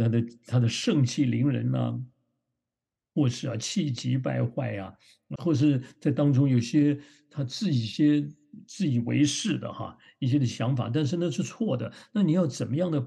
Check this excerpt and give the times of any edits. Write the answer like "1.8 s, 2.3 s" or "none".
5.4 s